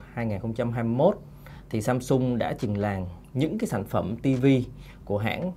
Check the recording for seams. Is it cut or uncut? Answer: uncut